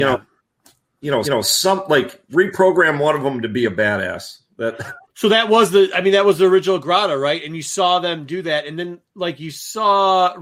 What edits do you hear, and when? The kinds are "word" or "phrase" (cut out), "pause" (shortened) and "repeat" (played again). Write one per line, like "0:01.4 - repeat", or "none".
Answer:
0:01.2 - repeat
0:05.1 - pause